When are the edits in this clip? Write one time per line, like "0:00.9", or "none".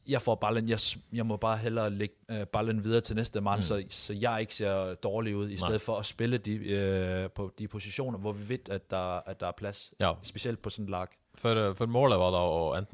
0:02.2
0:08.6

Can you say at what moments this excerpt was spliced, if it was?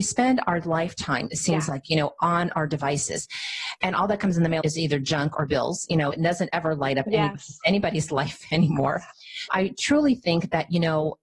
0:04.6
0:06.1
0:09.5

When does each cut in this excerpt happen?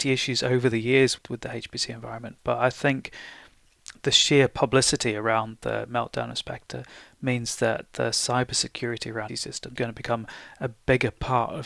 0:01.2
0:04.0
0:09.3
0:09.8

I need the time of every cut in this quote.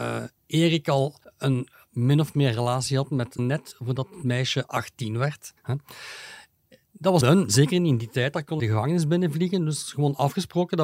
0:01.2
0:03.4
0:05.6
0:07.2
0:08.6

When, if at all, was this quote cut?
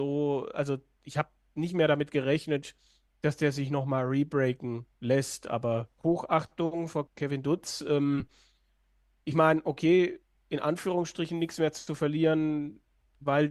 none

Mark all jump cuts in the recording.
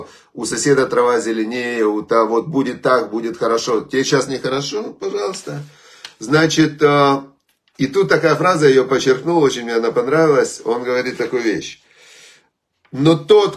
none

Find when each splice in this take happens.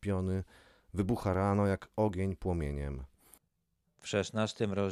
none

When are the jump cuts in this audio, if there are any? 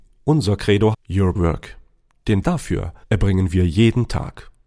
0:00.9
0:01.3
0:02.4
0:03.0

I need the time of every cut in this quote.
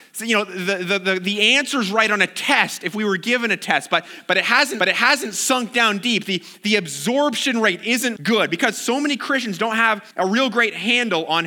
0:04.8
0:08.2
0:10.1

